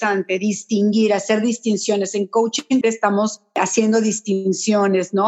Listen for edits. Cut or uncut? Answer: cut